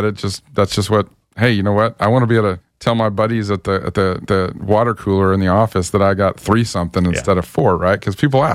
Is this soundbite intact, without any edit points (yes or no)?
no